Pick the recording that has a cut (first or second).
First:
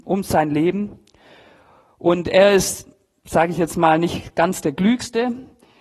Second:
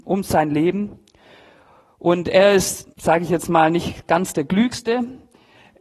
second